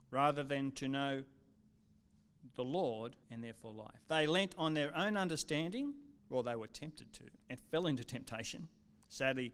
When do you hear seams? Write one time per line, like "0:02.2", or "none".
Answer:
0:03.2
0:04.0
0:06.2
0:07.4